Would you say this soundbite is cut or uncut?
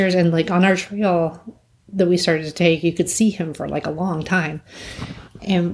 uncut